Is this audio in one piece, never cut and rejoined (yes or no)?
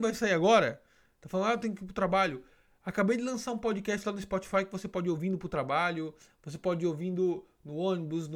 yes